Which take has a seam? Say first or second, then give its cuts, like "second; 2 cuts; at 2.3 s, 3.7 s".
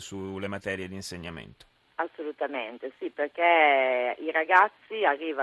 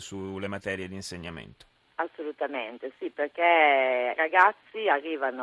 second; 1 cut; at 4.2 s